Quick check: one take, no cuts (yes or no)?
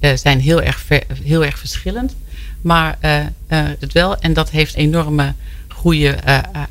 no